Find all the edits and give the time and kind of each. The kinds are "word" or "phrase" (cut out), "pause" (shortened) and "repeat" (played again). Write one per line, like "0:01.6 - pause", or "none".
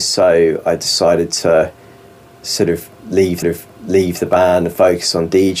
0:03.4 - repeat